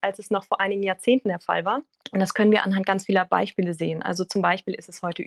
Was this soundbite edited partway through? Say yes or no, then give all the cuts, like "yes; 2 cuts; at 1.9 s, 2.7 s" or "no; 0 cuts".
yes; 1 cut; at 1.9 s